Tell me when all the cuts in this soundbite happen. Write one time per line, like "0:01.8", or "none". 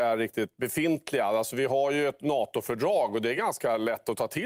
none